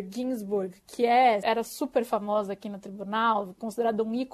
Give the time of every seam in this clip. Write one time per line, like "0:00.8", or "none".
0:01.4